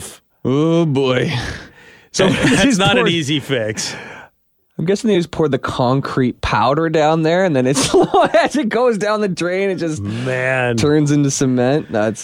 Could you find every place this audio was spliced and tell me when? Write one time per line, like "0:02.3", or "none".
none